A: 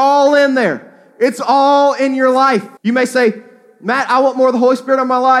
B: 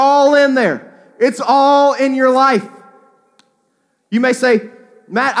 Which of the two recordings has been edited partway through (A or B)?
A